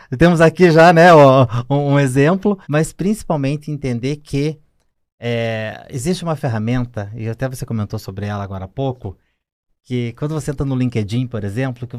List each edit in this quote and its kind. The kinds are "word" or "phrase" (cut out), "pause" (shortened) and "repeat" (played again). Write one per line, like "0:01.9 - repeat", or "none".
0:02.6 - pause

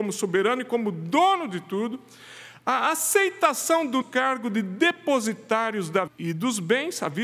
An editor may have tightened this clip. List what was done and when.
0:04.0 - word
0:06.1 - word

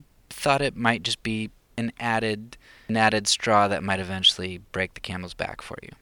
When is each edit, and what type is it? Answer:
none

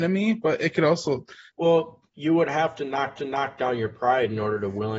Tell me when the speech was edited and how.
0:01.5 - phrase
0:02.1 - pause
0:03.2 - repeat

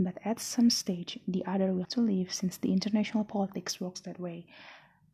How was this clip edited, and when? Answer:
0:01.8 - word

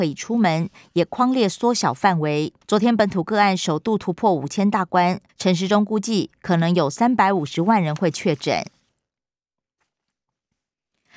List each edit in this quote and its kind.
0:02.6 - pause
0:05.3 - pause

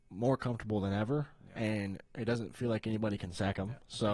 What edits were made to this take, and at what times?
none

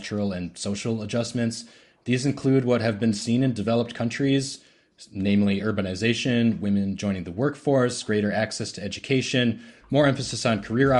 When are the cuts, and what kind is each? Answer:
none

